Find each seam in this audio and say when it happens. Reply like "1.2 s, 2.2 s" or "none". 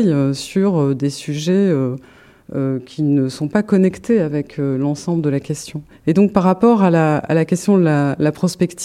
5.9 s